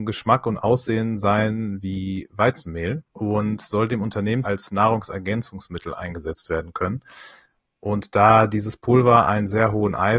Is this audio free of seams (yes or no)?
no